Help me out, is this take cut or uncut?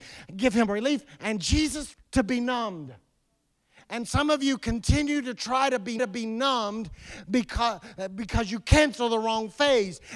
cut